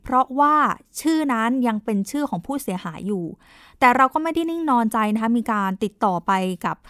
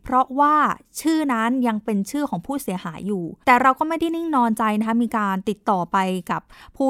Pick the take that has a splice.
second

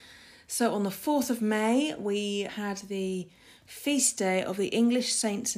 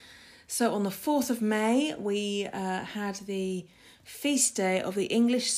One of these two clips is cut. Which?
first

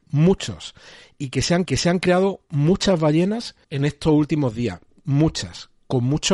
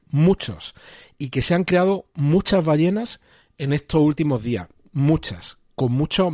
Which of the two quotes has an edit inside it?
first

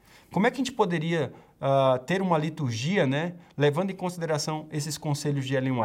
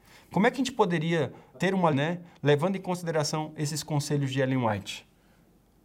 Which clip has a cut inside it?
second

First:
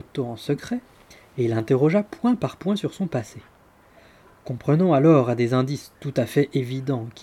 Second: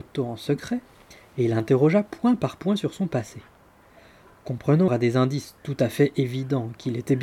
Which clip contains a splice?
second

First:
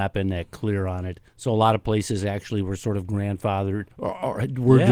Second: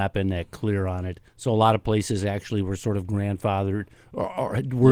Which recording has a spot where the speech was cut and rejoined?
first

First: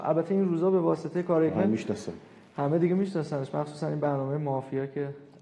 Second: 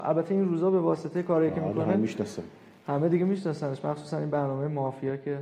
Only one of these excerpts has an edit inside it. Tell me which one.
first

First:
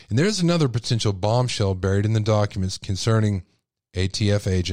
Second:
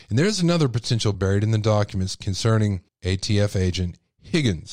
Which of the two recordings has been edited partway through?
second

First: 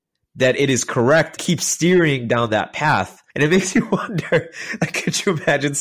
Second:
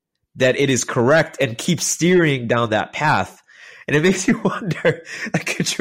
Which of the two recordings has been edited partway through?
first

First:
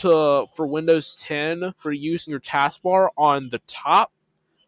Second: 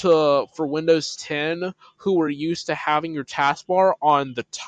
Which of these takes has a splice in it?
first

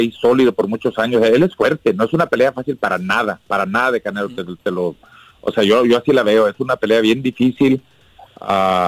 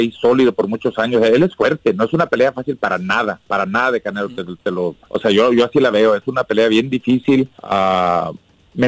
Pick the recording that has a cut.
second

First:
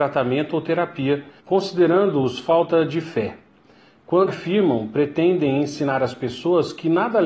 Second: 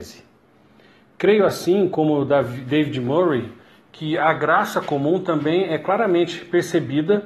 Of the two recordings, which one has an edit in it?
first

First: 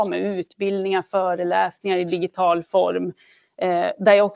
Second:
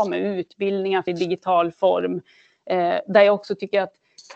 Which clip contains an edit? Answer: second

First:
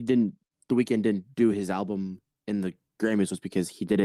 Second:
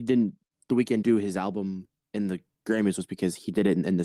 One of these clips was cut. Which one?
second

